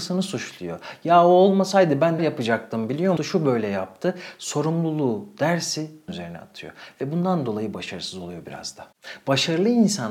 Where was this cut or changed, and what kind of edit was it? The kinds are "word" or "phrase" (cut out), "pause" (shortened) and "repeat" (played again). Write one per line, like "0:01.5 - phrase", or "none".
0:02.2 - word
0:03.2 - phrase
0:06.1 - word